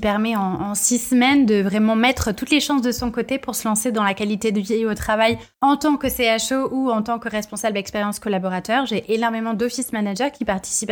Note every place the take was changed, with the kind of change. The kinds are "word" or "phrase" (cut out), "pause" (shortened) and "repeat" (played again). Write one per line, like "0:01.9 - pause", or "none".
none